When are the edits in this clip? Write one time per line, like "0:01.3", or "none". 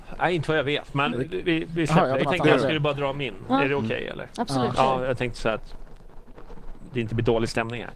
0:01.1
0:01.4
0:02.2